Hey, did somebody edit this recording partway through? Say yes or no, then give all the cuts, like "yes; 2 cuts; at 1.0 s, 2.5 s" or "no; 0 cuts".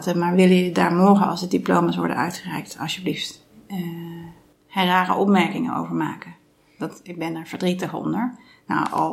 no; 0 cuts